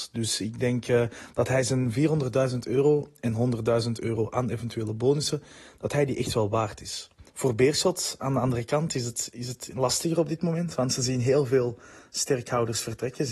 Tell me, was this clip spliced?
yes; 1 cut; at 7.3 s

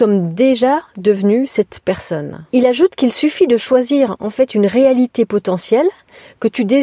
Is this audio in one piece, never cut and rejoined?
no; 1 cut; at 2.5 s

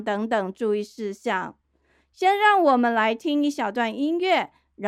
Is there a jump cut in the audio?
no; 0 cuts

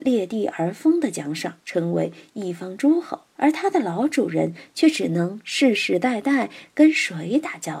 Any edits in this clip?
yes; 2 cuts; at 1.6 s, 3.3 s

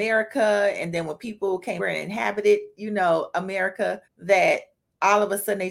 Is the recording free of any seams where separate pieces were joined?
no; 2 cuts; at 1.8 s, 4.0 s

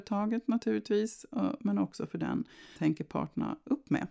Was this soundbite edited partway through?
yes; 1 cut; at 2.8 s

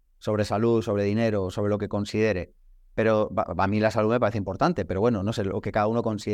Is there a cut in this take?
no; 0 cuts

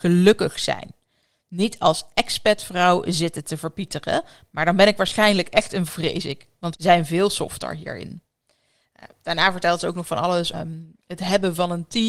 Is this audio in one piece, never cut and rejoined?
no; 3 cuts; at 5.9 s, 6.7 s, 10.5 s

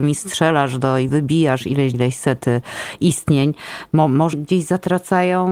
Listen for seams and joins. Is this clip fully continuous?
no; 3 cuts; at 1.1 s, 1.9 s, 4.3 s

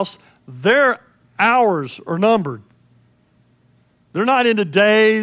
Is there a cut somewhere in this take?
no; 0 cuts

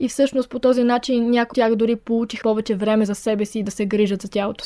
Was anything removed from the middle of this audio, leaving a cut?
yes; 2 cuts; at 1.5 s, 2.4 s

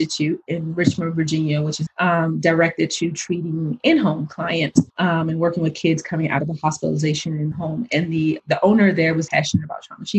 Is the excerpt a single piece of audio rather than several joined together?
no; 5 cuts; at 1.9 s, 4.9 s, 7.5 s, 8.4 s, 9.3 s

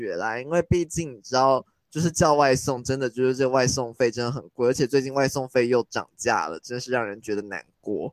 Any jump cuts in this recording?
no; 0 cuts

